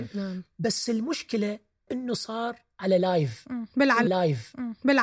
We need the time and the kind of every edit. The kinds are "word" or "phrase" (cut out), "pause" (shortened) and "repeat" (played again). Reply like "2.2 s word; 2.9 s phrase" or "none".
1.9 s word; 4.1 s repeat

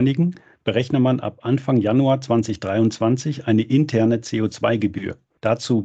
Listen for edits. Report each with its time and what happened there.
none

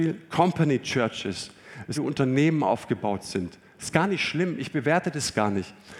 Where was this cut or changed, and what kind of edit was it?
1.9 s phrase

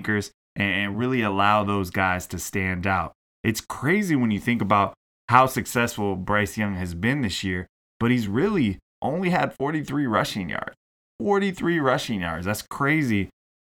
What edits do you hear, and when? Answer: none

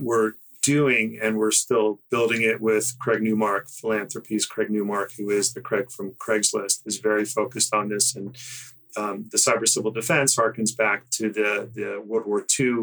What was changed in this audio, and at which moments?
none

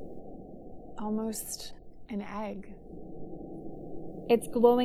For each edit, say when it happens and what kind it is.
2.0 s word

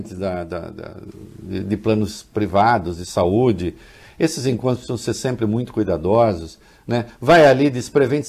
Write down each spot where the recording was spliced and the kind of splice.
none

